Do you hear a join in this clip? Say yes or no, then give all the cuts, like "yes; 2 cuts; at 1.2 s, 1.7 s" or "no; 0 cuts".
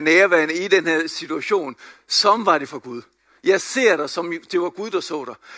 no; 0 cuts